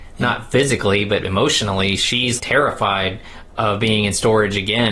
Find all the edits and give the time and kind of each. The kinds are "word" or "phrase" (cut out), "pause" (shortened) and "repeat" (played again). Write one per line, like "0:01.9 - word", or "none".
0:02.4 - word